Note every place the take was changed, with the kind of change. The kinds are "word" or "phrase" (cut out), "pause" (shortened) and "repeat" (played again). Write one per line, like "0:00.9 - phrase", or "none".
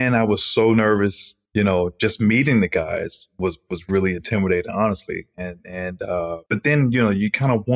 0:01.5 - pause
0:06.5 - pause